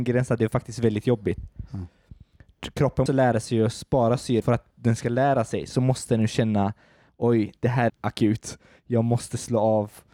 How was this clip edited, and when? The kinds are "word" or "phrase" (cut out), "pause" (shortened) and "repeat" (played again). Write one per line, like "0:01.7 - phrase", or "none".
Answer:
0:03.1 - word
0:04.4 - word
0:07.6 - word
0:07.9 - word